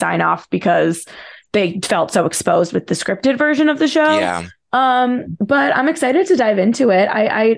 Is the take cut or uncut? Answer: uncut